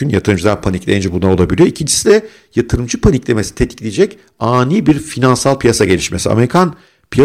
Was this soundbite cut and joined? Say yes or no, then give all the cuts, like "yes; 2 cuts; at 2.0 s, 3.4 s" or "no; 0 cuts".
no; 0 cuts